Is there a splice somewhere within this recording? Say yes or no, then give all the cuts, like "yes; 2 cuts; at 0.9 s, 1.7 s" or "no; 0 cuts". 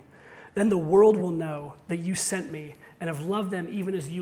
no; 0 cuts